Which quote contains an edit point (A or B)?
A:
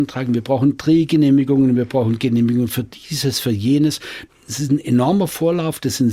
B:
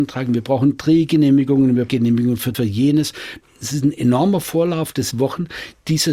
B